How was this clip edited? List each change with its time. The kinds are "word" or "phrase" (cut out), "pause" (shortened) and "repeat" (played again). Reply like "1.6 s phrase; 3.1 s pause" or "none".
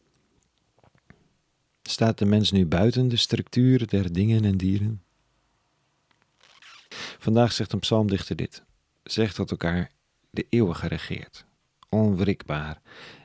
none

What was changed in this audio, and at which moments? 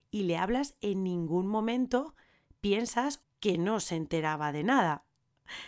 3.2 s phrase

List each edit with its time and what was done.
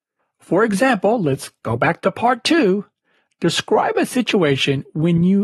none

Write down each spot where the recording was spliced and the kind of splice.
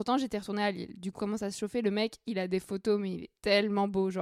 1.2 s word

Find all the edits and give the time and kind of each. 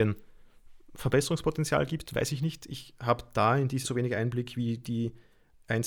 3.8 s word

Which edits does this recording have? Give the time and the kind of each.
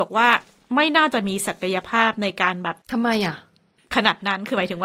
2.8 s pause

